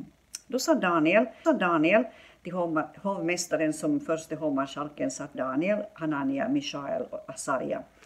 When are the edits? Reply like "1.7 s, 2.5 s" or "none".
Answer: 1.4 s, 5.3 s